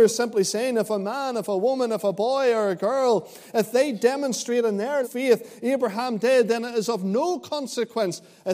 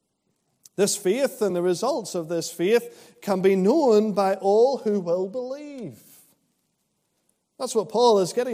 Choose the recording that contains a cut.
first; 1 cut; at 5.0 s

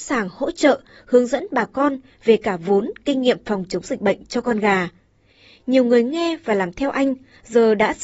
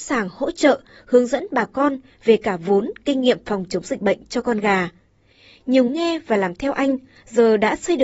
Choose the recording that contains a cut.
second; 1 cut; at 5.9 s

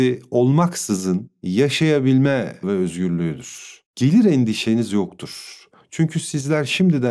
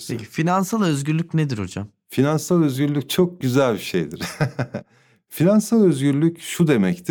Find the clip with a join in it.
first; 2 cuts; at 2.6 s, 3.9 s

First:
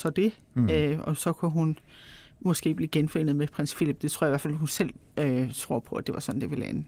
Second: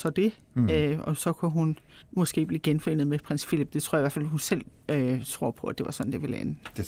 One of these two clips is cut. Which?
second; 1 cut; at 2.0 s

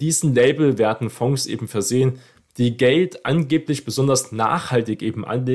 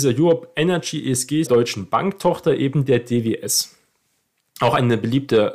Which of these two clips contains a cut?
second; 1 cut; at 1.5 s

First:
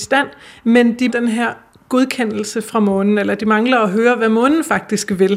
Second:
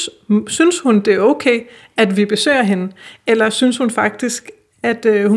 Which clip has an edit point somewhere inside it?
first; 1 cut; at 1.1 s

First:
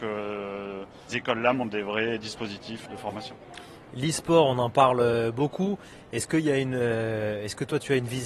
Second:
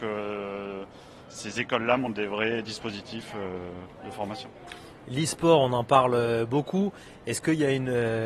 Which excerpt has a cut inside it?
first; 2 cuts; at 1.1 s, 2.9 s

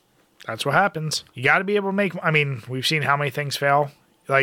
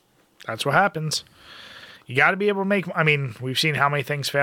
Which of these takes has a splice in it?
first; 1 cut; at 1.3 s

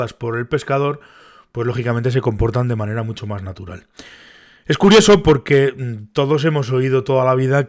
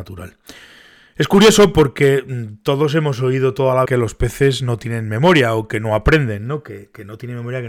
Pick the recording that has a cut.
second; 1 cut; at 3.9 s

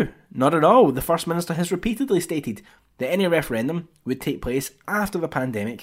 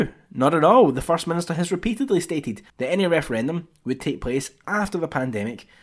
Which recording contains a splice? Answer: second; 1 cut; at 2.7 s

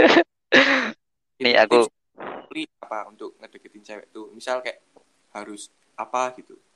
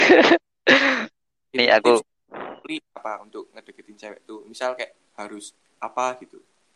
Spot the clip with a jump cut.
second; 1 cut; at 5.1 s

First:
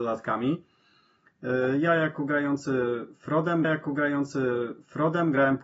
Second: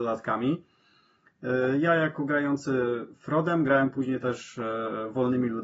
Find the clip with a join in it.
first; 1 cut; at 3.6 s

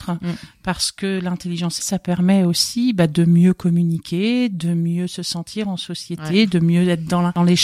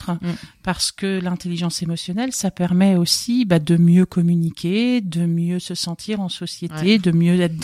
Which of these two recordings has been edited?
first; 1 cut; at 1.8 s

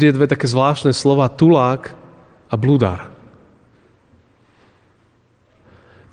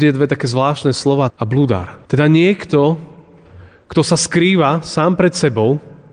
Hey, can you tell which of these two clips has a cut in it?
second; 2 cuts; at 1.3 s, 2.0 s

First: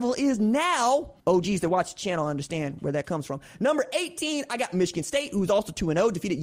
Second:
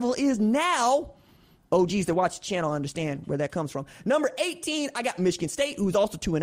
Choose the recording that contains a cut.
first; 1 cut; at 1.2 s

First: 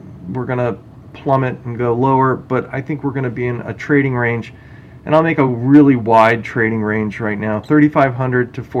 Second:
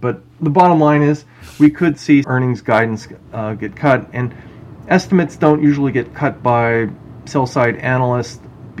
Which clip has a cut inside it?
second; 1 cut; at 2.2 s

